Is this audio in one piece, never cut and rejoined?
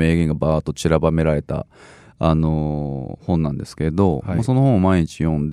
yes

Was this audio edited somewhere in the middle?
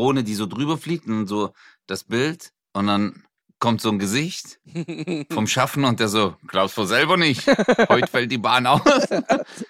yes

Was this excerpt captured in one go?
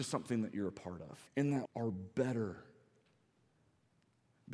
no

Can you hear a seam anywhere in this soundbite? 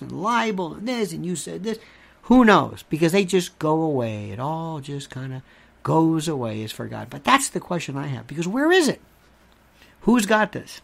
no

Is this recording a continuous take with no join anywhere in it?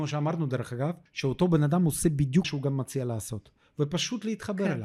no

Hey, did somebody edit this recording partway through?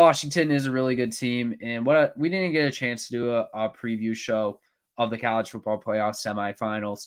no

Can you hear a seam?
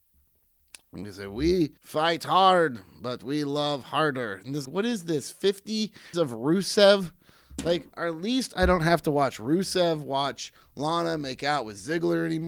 yes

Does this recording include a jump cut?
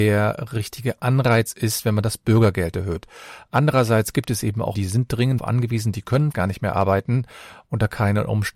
yes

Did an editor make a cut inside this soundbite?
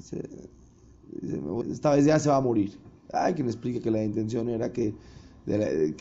yes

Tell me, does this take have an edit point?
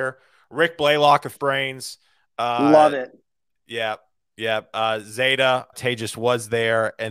yes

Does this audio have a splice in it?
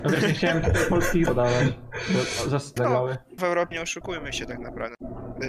yes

